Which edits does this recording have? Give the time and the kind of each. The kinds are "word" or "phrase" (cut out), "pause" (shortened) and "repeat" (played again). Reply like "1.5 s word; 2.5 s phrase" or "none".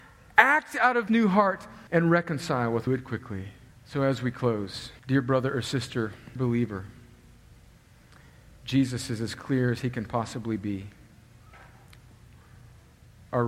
1.1 s word; 1.9 s pause; 2.9 s phrase; 3.7 s pause; 5.0 s pause; 6.4 s word